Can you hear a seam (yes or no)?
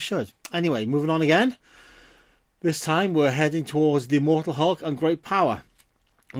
no